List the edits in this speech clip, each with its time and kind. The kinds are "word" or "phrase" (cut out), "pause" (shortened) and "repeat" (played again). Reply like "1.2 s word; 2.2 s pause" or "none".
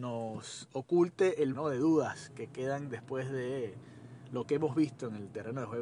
1.5 s word